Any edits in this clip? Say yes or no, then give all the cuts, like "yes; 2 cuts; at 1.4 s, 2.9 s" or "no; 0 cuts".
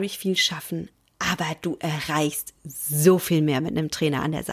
no; 0 cuts